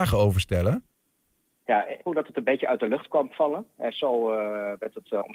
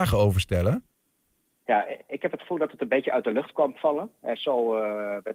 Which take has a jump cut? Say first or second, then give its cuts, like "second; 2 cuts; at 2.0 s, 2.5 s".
first; 1 cut; at 2.1 s